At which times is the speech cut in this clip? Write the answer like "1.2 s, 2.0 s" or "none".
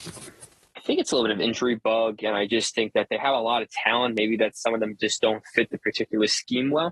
none